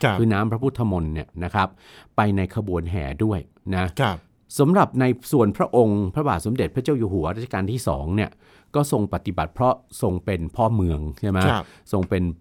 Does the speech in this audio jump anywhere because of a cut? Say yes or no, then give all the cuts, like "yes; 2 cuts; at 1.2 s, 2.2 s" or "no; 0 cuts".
no; 0 cuts